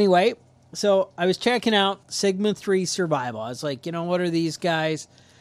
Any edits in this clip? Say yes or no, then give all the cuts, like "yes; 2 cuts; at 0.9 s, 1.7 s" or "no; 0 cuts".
yes; 1 cut; at 2.0 s